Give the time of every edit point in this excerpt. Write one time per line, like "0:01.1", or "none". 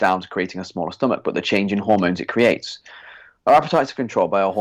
none